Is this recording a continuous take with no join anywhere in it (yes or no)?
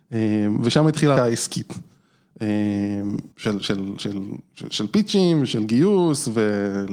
no